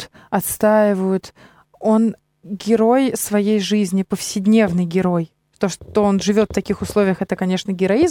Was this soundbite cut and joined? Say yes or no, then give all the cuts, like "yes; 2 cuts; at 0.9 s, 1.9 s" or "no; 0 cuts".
no; 0 cuts